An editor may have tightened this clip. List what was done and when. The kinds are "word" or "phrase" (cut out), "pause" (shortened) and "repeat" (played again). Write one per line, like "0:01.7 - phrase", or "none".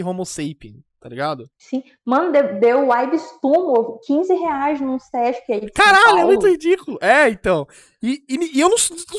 none